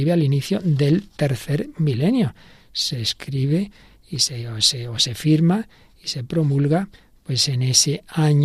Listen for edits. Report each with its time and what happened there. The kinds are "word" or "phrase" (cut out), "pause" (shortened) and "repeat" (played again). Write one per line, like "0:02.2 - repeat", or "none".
none